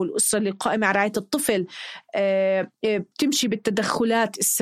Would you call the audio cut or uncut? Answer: uncut